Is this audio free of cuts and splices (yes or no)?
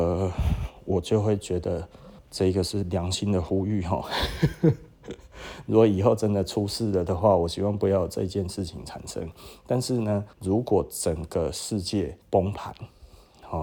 no